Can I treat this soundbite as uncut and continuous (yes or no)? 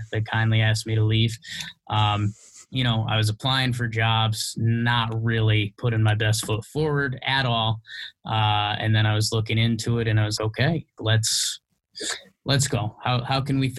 no